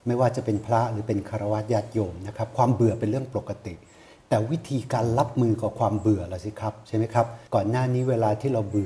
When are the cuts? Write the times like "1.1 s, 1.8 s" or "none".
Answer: 7.5 s